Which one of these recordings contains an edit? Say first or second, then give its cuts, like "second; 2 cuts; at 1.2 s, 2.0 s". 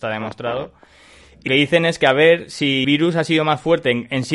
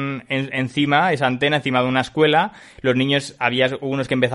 first; 2 cuts; at 1.5 s, 2.8 s